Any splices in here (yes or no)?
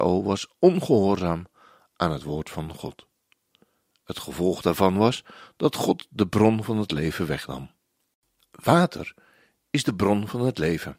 no